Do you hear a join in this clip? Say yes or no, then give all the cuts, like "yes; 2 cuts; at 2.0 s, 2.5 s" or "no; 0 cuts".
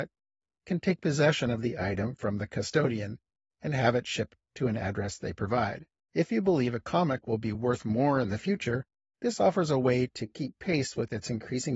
no; 0 cuts